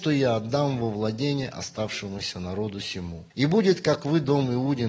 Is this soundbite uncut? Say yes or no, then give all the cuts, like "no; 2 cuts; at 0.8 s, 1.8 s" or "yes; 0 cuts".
no; 1 cut; at 3.3 s